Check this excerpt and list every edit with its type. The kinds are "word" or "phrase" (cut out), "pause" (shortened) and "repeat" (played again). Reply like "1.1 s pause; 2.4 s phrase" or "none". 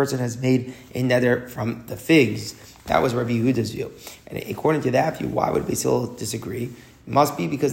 none